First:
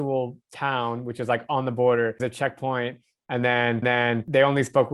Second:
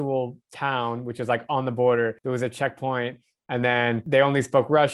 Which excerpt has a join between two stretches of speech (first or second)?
first